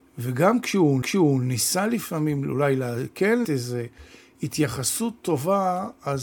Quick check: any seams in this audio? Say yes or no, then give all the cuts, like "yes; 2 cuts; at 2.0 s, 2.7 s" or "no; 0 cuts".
yes; 2 cuts; at 1.0 s, 3.4 s